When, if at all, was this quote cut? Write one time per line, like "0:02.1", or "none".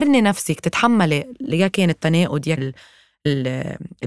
0:02.6